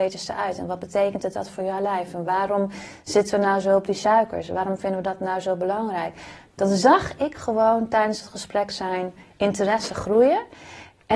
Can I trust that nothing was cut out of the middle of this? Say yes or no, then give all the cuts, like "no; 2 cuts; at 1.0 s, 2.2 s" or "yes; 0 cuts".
yes; 0 cuts